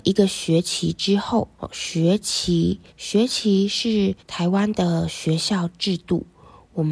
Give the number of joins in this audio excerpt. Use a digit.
3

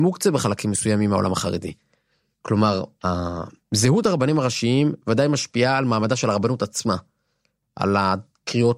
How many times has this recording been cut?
1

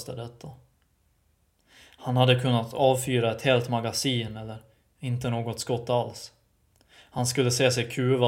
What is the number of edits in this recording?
0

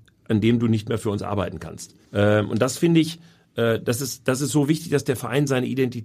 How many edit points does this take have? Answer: 1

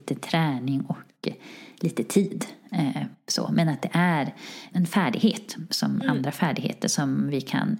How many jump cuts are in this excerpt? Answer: 1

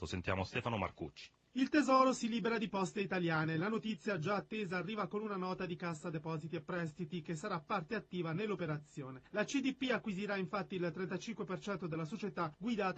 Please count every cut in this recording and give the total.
0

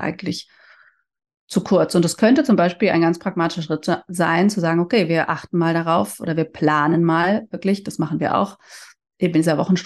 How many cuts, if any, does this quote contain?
0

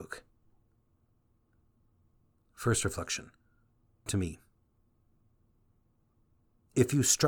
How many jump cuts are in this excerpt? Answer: 1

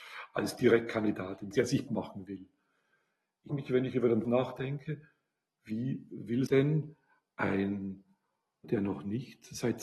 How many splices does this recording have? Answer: 6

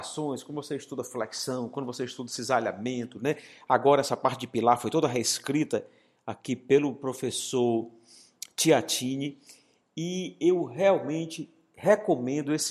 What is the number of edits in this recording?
0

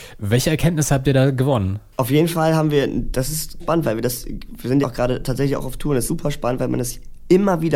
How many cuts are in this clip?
3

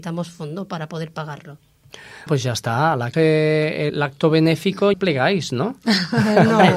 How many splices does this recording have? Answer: 4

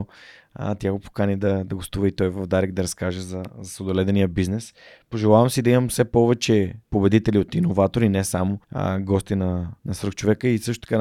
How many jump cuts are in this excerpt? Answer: 3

